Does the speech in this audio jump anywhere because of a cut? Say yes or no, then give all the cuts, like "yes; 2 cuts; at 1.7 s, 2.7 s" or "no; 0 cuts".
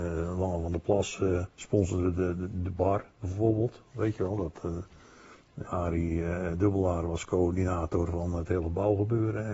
yes; 3 cuts; at 1.5 s, 3.1 s, 5.7 s